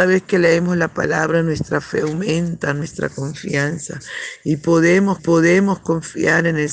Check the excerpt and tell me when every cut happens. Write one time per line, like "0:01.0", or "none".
0:05.2